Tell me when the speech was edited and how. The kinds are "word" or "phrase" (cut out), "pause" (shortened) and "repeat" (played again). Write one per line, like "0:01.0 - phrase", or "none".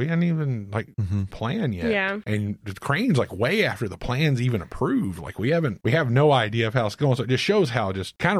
0:00.9 - pause
0:01.3 - phrase